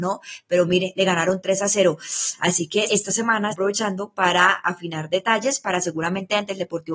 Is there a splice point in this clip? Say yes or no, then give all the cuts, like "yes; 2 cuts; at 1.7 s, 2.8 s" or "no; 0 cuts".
yes; 2 cuts; at 2.9 s, 3.5 s